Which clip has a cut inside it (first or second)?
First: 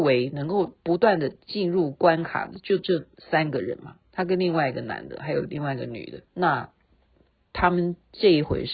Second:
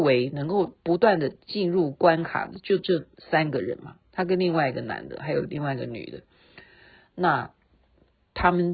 first